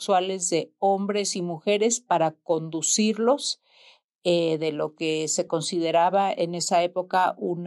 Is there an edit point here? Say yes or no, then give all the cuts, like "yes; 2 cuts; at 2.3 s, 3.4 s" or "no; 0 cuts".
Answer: no; 0 cuts